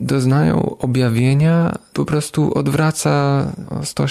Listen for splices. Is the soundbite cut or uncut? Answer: cut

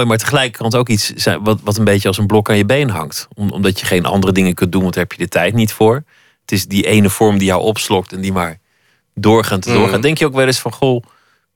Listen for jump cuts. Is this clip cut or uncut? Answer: uncut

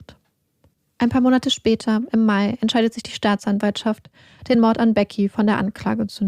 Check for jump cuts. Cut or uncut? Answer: uncut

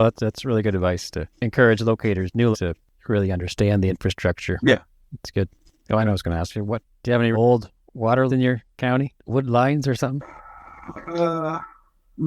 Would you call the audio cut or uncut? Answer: cut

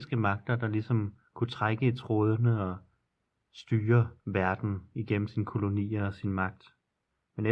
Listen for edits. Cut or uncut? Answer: uncut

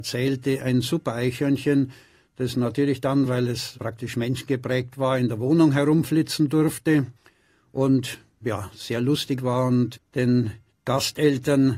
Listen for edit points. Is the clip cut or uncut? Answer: uncut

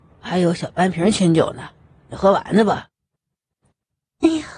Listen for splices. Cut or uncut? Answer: uncut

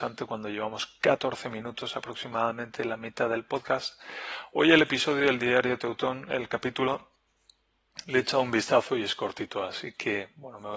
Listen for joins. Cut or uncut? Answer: uncut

